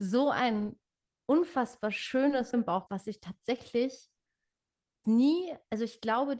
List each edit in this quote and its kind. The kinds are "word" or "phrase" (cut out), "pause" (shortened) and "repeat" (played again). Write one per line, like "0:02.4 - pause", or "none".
0:02.5 - word
0:02.9 - word
0:05.0 - word